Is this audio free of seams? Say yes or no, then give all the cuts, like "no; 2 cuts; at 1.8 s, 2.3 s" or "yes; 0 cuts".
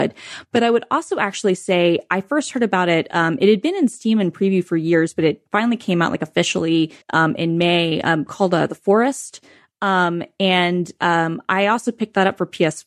no; 1 cut; at 7.0 s